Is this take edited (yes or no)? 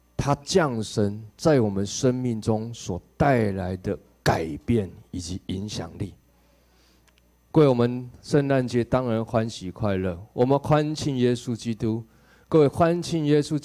no